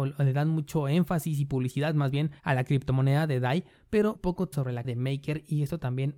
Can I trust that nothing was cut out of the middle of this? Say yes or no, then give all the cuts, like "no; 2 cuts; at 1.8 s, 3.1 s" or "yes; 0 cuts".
no; 4 cuts; at 2.4 s, 4.2 s, 4.5 s, 4.8 s